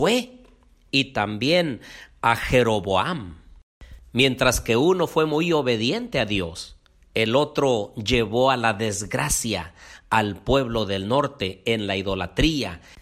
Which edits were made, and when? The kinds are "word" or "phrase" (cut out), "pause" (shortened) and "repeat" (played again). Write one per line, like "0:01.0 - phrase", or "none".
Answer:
none

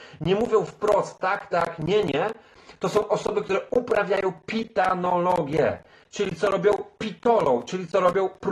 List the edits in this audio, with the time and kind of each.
none

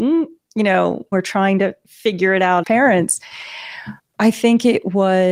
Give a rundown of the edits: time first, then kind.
0:01.1 - phrase
0:02.6 - word
0:04.0 - pause

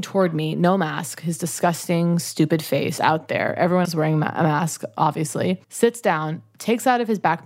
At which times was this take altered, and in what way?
0:03.0 - word
0:03.8 - word
0:05.6 - pause

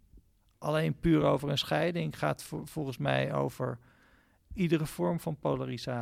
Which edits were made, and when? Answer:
none

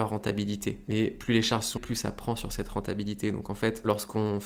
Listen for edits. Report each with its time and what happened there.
0:01.8 - word

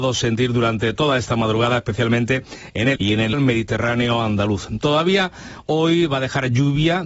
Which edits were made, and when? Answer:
0:03.0 - word
0:03.3 - word

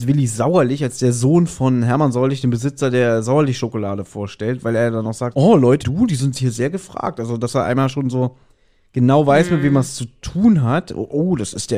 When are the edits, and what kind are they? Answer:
0:05.3 - word
0:05.8 - word

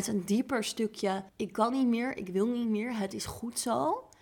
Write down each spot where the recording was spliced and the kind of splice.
0:01.3 - pause

